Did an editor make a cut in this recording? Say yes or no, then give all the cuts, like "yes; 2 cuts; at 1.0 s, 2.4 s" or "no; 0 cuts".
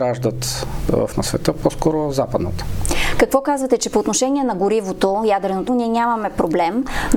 yes; 2 cuts; at 1.1 s, 5.7 s